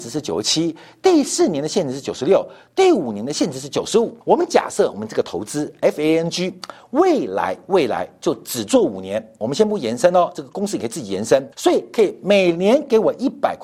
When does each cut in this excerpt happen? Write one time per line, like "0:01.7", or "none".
0:04.2
0:11.5